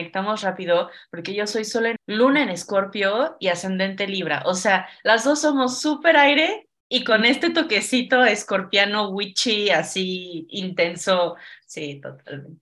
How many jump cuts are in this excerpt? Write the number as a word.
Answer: one